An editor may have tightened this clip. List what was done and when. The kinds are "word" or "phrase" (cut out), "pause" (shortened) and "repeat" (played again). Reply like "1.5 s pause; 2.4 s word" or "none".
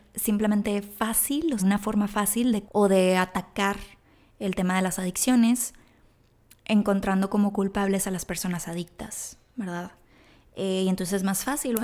1.6 s word; 2.6 s word